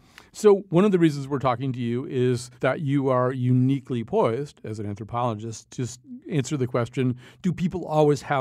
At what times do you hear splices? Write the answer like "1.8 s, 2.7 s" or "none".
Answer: 2.5 s

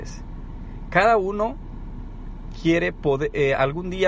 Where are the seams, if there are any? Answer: none

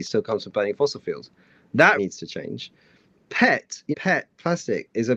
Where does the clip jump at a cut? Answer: 2.0 s, 3.9 s

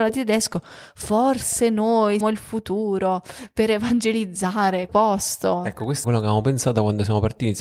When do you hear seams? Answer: 2.2 s, 4.9 s, 6.0 s

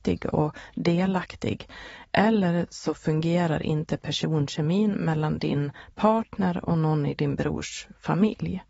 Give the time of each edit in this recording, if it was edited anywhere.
none

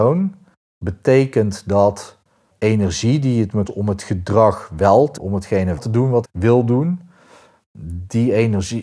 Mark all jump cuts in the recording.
2.5 s, 3.7 s, 5.2 s, 5.8 s, 6.2 s

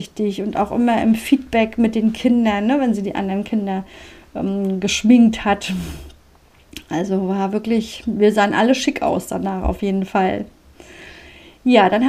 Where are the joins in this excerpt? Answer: none

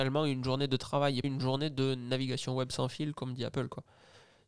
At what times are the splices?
1.2 s

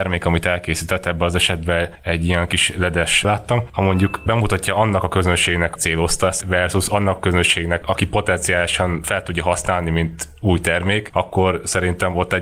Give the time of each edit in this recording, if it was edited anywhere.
3.2 s, 5.8 s, 6.4 s, 7.8 s

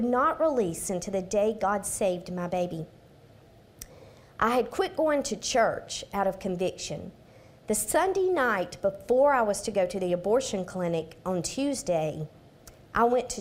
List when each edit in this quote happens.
none

